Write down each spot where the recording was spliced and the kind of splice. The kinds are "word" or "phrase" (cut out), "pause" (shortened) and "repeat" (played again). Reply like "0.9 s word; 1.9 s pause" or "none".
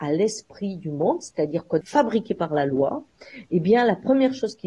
1.8 s phrase